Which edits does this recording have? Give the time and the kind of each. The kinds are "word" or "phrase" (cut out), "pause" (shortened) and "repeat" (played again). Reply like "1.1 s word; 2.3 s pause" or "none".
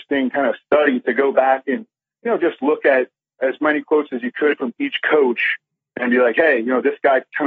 none